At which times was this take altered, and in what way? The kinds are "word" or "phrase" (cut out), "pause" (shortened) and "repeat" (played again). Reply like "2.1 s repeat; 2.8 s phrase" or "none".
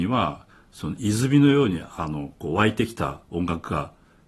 3.2 s pause